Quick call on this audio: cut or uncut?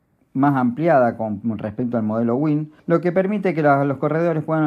cut